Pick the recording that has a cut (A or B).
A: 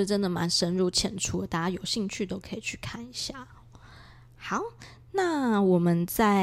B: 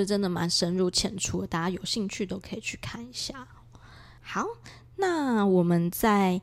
B